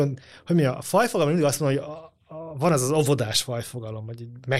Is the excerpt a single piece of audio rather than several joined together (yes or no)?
yes